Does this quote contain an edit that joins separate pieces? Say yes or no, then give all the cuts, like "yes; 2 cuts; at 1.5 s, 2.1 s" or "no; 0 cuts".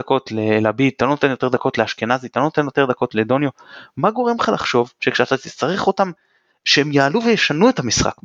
no; 0 cuts